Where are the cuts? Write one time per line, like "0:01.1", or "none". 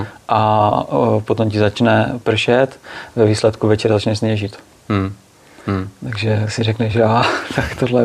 none